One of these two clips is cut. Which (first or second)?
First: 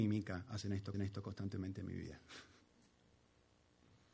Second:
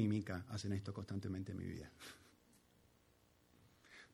first